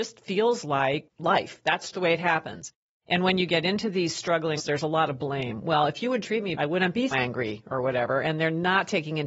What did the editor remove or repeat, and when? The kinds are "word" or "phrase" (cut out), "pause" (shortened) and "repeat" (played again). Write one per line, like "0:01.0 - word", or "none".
0:01.9 - word
0:04.6 - word
0:06.2 - word
0:06.6 - word
0:07.1 - word